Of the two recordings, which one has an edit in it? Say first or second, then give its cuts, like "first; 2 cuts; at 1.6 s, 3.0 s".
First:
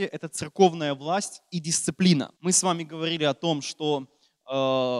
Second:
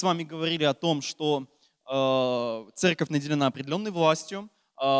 first; 1 cut; at 2.4 s